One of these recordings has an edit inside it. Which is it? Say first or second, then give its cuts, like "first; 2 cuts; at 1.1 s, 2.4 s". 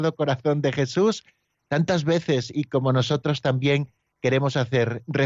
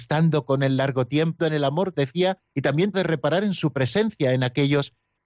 second; 4 cuts; at 1.4 s, 1.9 s, 2.5 s, 2.9 s